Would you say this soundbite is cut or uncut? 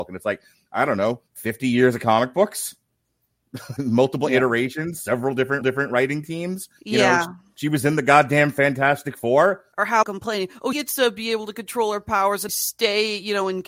cut